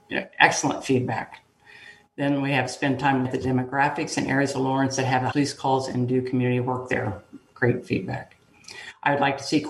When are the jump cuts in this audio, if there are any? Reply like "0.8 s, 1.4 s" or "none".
3.2 s, 5.3 s